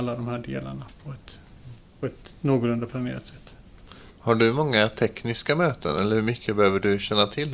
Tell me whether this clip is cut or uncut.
cut